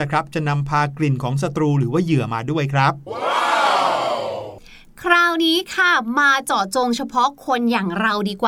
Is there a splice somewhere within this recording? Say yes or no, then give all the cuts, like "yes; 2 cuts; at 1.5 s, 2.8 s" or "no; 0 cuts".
no; 0 cuts